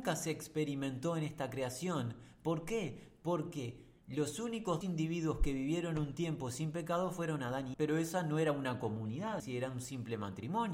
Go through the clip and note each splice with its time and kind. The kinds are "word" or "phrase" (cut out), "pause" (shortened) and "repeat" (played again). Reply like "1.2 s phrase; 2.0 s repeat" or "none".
4.8 s word; 7.7 s word; 9.4 s word